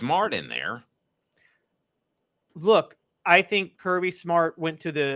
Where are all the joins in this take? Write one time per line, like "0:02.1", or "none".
0:03.7

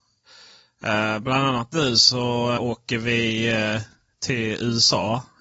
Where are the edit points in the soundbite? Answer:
0:02.6

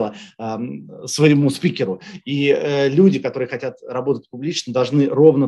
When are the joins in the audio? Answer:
none

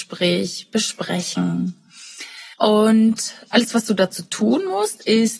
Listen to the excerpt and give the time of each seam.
0:02.5

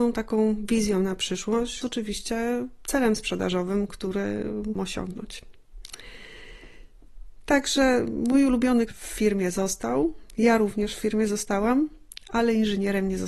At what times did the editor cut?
0:01.8
0:04.8
0:08.9

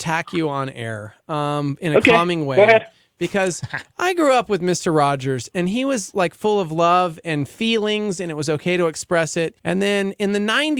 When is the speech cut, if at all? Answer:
0:09.6

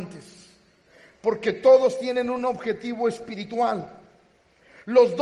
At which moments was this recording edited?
none

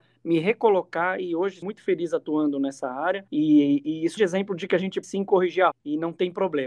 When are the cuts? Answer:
0:01.6
0:03.3
0:04.2
0:05.0
0:05.7

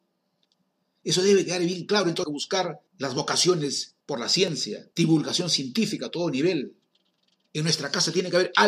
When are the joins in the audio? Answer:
0:02.2
0:02.9
0:04.0
0:04.9

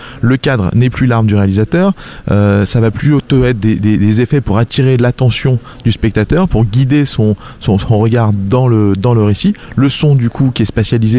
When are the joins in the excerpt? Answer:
none

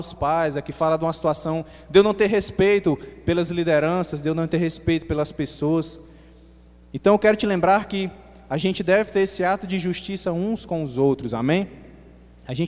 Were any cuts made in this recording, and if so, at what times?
none

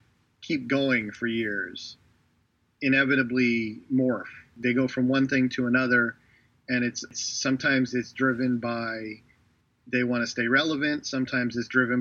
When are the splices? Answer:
none

